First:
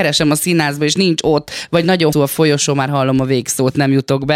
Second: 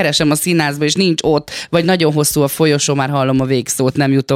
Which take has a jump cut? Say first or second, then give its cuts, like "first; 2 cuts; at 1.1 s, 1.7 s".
first; 1 cut; at 2.1 s